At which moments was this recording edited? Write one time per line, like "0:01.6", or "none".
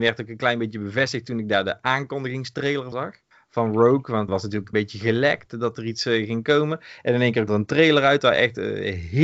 0:02.9
0:03.3
0:04.3
0:04.7
0:07.5